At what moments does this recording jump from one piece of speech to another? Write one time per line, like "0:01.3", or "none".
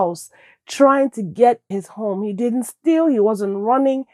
0:01.7